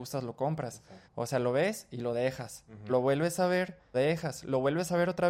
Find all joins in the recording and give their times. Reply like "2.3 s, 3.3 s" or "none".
1.0 s, 2.9 s, 3.9 s

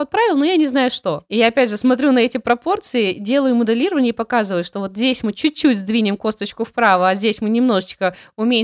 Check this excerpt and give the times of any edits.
none

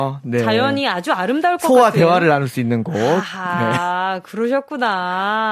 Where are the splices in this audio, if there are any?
none

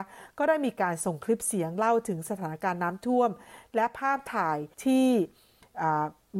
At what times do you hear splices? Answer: 4.7 s

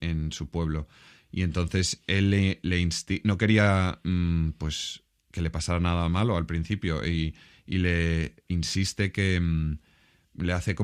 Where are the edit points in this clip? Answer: none

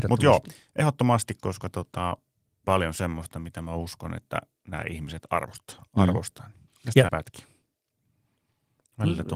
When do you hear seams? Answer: 2.6 s, 6.7 s, 7.1 s

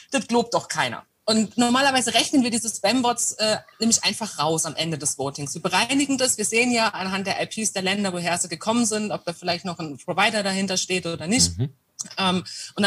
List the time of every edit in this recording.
none

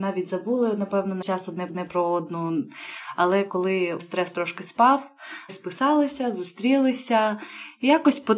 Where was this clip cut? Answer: 1.2 s, 1.7 s, 4.0 s, 5.5 s

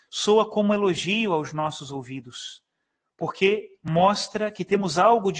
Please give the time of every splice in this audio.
none

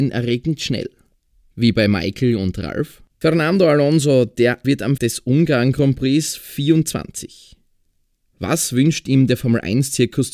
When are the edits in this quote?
3.1 s, 4.6 s, 5.0 s

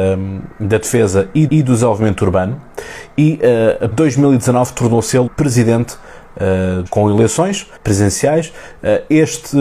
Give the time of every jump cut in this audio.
1.5 s, 3.9 s, 5.3 s, 6.9 s, 7.8 s

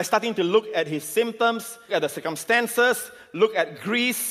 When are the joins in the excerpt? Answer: 1.9 s

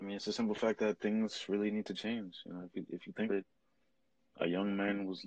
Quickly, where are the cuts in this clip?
3.3 s

